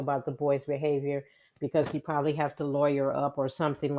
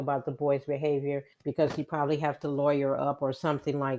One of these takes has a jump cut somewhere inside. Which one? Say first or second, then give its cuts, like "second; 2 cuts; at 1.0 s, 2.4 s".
second; 1 cut; at 1.3 s